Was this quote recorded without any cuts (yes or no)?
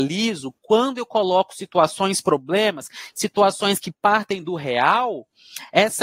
yes